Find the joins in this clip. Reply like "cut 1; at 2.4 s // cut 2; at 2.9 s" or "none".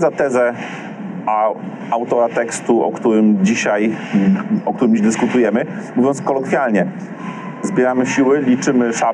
cut 1; at 5.0 s // cut 2; at 6.2 s